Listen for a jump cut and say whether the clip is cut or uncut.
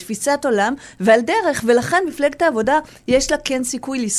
uncut